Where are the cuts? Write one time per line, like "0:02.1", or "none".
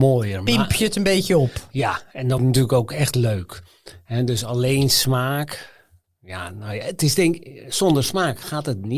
0:02.4

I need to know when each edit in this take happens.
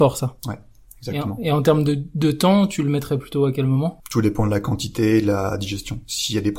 none

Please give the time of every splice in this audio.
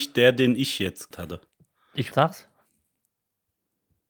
0:01.1
0:02.1

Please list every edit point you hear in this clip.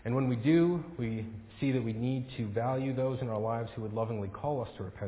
none

